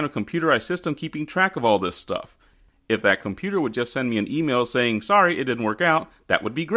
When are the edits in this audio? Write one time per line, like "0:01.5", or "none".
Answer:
none

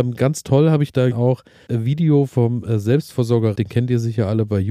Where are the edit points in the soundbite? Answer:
0:01.1
0:01.7
0:03.5

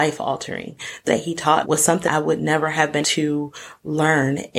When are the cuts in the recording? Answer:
0:01.1
0:01.6
0:02.0
0:03.0

